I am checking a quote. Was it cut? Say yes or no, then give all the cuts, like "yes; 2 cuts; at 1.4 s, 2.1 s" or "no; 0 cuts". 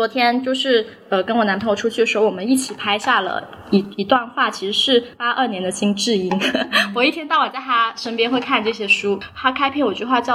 yes; 1 cut; at 5.1 s